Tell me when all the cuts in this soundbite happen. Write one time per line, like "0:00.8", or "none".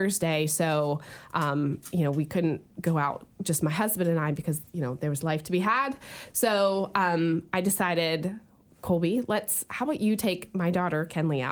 none

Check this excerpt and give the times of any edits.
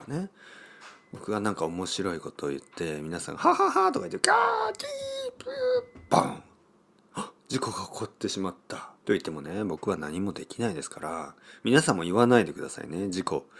0:07.4
0:09.0

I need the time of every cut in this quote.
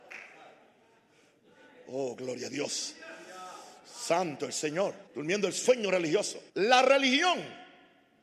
0:05.1
0:06.5

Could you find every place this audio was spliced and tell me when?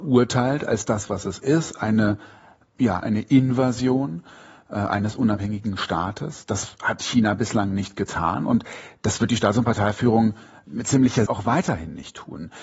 0:03.0
0:11.3

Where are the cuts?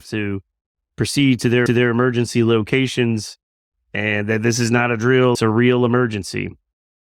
0:01.7
0:05.3

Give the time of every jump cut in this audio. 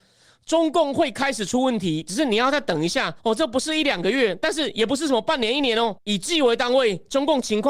0:03.2
0:06.0

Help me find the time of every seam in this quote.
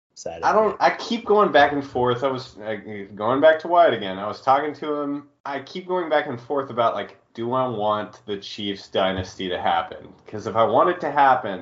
0:05.4

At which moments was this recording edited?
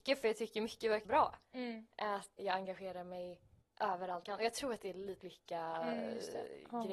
0:01.0
0:02.4
0:03.6
0:04.2
0:05.2

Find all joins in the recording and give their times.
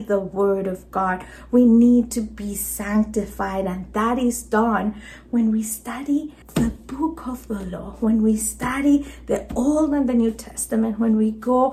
0:06.4

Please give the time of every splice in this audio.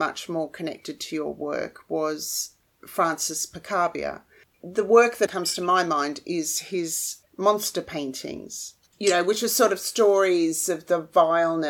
0:05.3

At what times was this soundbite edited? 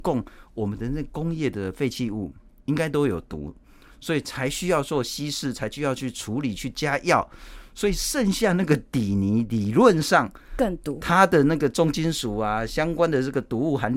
none

